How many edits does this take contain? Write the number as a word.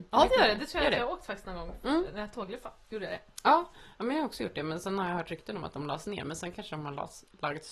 zero